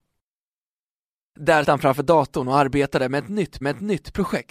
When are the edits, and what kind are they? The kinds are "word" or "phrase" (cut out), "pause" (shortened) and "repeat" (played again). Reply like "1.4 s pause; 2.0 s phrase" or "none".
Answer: 1.6 s word; 3.6 s repeat